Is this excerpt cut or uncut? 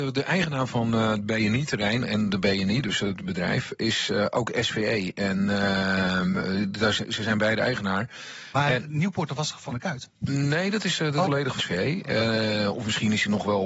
cut